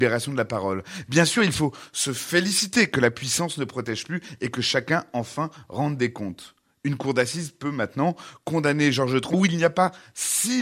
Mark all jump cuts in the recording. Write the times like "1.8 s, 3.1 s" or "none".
9.3 s